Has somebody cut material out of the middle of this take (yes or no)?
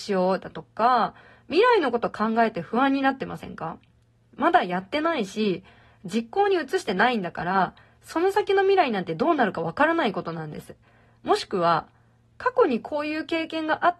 no